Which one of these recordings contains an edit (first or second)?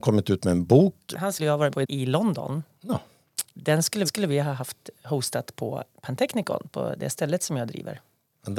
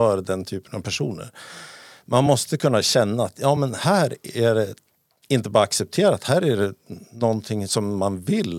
first